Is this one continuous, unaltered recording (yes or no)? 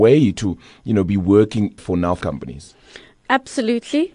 no